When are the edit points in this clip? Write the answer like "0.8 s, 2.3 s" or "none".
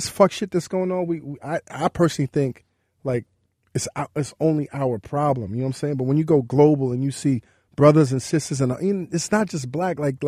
none